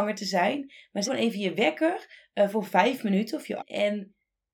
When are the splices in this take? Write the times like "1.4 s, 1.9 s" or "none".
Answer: 1.1 s, 3.6 s

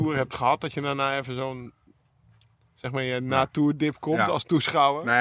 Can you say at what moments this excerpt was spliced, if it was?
none

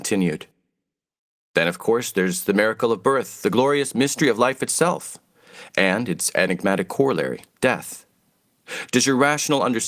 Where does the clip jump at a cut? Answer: 7.5 s

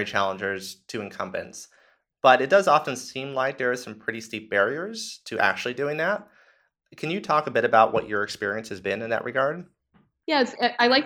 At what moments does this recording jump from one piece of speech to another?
none

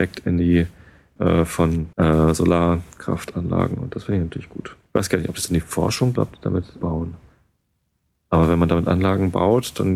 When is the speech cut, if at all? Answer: 1.2 s, 1.9 s, 4.9 s, 6.2 s, 6.8 s

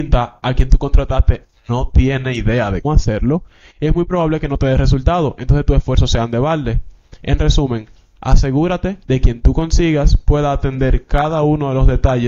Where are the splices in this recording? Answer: 2.8 s, 9.0 s

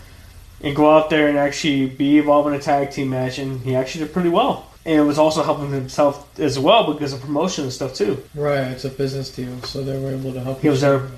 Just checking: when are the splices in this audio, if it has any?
4.8 s, 8.3 s

